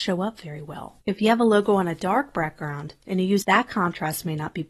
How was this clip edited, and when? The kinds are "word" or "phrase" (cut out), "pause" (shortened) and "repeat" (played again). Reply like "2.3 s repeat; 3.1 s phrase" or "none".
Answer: 1.0 s pause; 3.4 s phrase